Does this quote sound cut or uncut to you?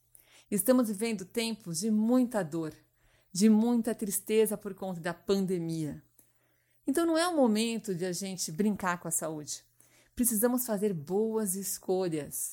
uncut